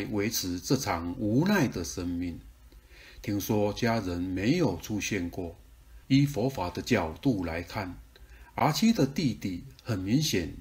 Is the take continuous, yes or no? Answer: no